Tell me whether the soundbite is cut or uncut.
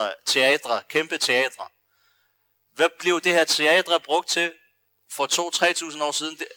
uncut